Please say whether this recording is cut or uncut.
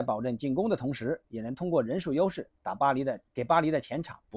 uncut